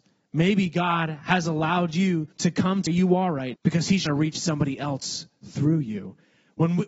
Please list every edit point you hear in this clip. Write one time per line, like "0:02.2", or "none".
0:02.3
0:02.9
0:03.5
0:04.1